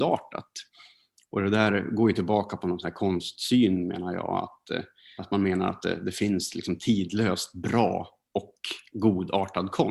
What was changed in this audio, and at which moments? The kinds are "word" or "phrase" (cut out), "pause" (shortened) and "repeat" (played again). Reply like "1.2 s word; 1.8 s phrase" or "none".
5.2 s word